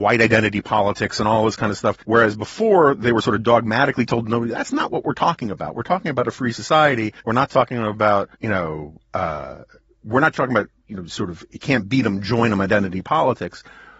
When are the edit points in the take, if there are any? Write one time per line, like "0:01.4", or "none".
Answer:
0:02.0
0:07.2
0:08.3